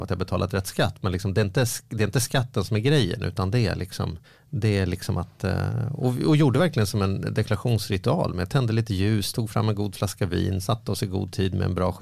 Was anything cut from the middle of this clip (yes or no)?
yes